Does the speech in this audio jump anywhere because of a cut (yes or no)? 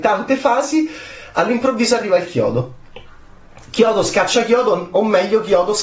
no